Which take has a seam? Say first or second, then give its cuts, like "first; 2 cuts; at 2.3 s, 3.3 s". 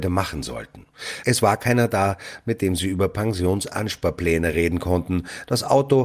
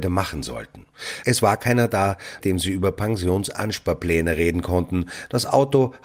second; 1 cut; at 2.4 s